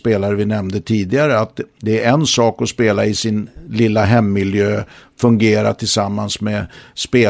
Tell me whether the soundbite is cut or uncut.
uncut